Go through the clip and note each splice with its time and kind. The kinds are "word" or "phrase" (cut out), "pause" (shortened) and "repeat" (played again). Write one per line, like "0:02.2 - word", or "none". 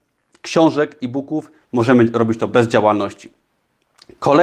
0:01.6 - pause